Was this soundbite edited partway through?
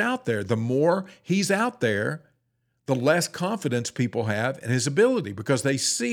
no; 0 cuts

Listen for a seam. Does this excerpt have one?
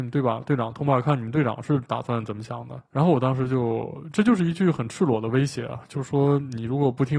no; 0 cuts

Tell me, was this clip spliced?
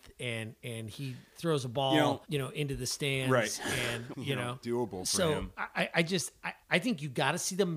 yes; 4 cuts; at 2.2 s, 4.1 s, 4.6 s, 6.6 s

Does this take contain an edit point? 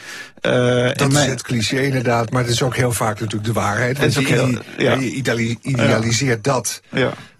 no; 0 cuts

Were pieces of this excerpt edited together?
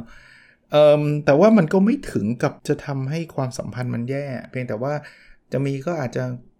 yes; 1 cut; at 2.6 s

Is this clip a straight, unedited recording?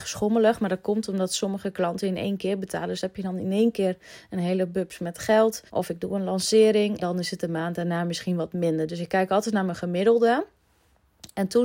no; 2 cuts; at 5.7 s, 7.0 s

